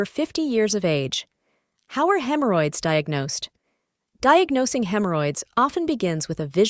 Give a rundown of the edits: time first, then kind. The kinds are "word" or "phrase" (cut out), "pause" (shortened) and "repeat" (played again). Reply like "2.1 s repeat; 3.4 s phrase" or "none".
none